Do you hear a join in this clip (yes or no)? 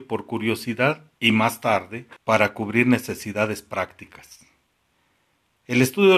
yes